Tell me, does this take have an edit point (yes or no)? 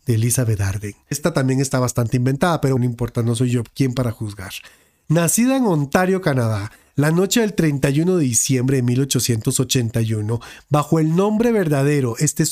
yes